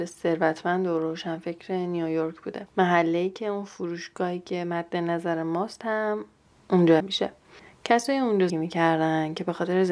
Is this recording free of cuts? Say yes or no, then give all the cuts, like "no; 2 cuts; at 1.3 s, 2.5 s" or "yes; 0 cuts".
no; 2 cuts; at 7.0 s, 8.5 s